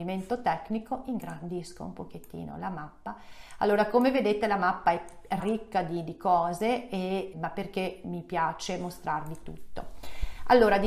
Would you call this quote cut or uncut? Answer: cut